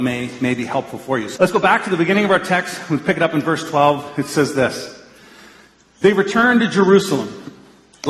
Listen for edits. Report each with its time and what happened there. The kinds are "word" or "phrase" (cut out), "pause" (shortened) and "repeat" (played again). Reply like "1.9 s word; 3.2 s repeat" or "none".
1.4 s word